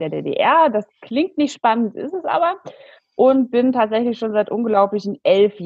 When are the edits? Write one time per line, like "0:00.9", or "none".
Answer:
none